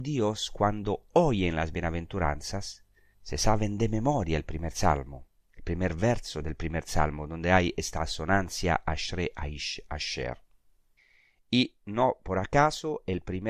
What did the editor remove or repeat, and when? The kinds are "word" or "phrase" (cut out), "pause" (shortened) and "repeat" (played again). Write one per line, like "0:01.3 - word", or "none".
0:03.1 - pause
0:11.0 - pause